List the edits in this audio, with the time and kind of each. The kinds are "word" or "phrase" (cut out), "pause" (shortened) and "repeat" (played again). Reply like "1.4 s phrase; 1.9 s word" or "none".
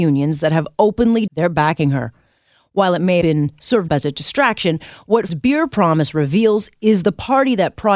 1.3 s word; 3.2 s word; 3.9 s word; 5.3 s word